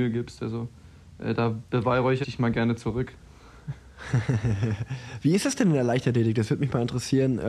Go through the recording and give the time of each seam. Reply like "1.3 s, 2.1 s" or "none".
2.2 s